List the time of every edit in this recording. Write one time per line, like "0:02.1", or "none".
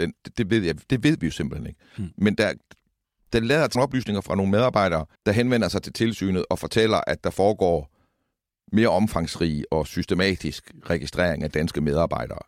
0:03.7
0:05.2